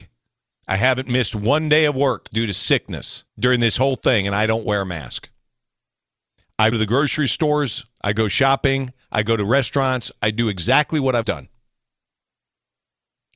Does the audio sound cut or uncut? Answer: cut